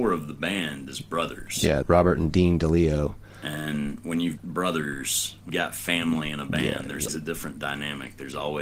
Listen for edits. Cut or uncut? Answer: cut